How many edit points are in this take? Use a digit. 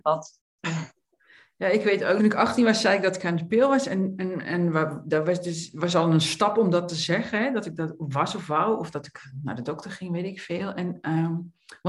1